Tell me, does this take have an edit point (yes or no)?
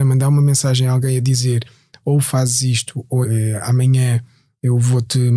yes